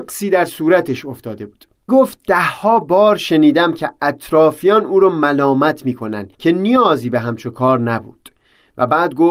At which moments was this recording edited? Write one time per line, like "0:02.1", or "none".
0:01.9
0:06.3